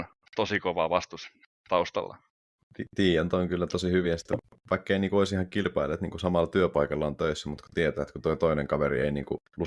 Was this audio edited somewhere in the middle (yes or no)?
no